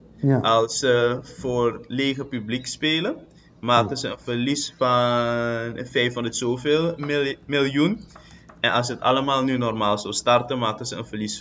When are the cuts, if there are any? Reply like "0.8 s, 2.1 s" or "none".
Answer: none